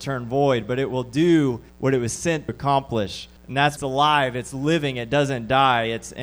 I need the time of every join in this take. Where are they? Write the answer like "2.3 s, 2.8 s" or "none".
1.7 s, 2.5 s, 3.4 s, 3.8 s